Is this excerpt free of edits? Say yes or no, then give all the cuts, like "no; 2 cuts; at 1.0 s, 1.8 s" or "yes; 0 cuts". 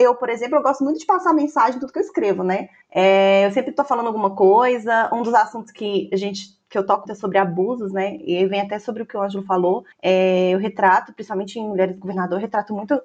no; 3 cuts; at 2.8 s, 7.1 s, 9.9 s